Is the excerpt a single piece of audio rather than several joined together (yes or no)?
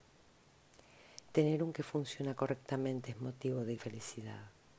no